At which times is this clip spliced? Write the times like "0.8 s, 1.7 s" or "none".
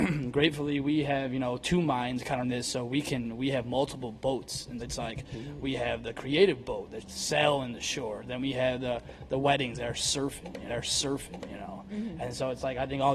2.4 s, 4.8 s, 7.0 s, 10.7 s